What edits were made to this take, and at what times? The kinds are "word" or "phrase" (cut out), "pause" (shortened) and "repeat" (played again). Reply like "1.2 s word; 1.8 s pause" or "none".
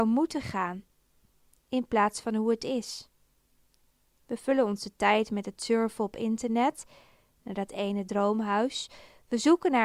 none